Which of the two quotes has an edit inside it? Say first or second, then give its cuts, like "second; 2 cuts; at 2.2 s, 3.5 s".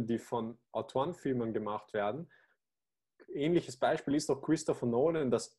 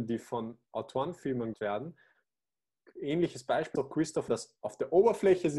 second; 3 cuts; at 1.5 s, 3.8 s, 4.3 s